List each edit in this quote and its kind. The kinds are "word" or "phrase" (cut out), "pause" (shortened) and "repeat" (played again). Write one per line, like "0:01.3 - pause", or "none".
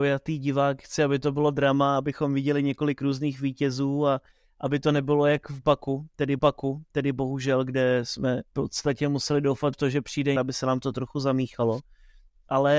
0:06.4 - repeat
0:08.5 - pause
0:09.7 - word
0:10.4 - phrase